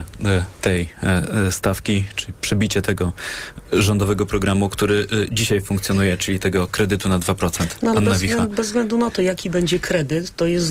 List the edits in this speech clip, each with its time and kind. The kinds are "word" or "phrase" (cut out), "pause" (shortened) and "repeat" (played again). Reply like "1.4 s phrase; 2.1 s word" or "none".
none